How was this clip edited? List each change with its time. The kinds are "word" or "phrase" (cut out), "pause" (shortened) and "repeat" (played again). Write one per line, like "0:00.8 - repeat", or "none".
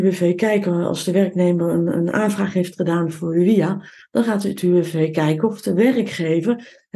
none